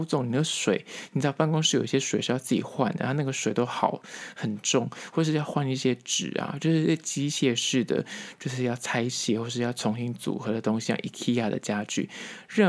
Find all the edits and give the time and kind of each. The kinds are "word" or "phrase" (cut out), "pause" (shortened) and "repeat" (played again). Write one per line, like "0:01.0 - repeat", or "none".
none